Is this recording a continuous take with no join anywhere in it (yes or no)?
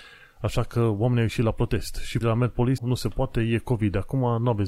no